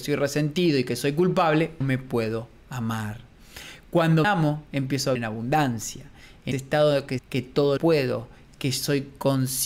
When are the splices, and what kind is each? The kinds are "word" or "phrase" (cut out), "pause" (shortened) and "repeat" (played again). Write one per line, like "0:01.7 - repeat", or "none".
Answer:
0:01.8 - word
0:04.2 - word
0:05.2 - word
0:06.5 - word
0:07.2 - word
0:07.8 - word